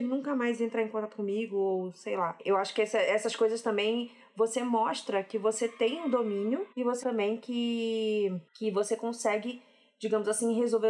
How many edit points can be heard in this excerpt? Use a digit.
3